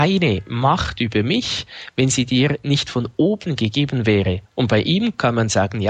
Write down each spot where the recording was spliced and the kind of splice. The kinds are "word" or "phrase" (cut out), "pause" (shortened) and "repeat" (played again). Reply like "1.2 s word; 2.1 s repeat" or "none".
4.4 s pause